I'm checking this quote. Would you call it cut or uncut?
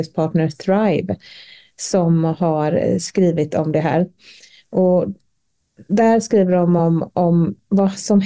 uncut